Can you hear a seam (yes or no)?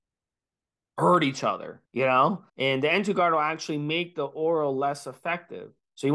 yes